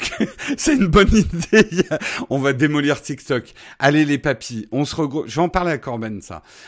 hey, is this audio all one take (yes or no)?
yes